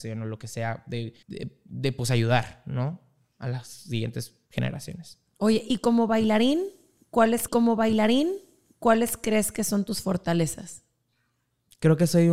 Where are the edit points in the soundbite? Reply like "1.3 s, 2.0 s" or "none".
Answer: 1.2 s, 4.5 s, 7.5 s